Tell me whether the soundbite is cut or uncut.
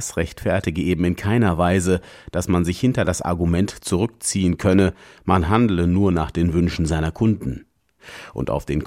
uncut